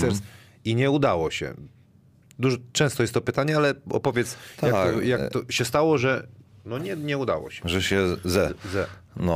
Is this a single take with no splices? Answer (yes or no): yes